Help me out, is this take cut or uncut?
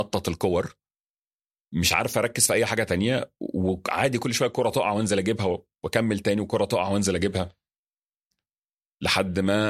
uncut